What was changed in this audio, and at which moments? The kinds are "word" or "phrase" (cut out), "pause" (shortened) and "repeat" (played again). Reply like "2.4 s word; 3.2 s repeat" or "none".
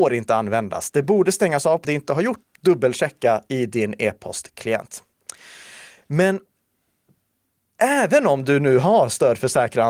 1.0 s word; 1.8 s phrase; 2.4 s word